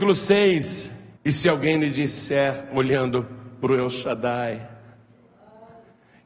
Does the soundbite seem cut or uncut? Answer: cut